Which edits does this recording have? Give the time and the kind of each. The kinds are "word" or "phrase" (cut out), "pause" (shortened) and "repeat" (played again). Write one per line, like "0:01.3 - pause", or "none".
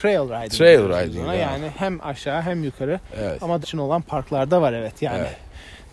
0:03.6 - word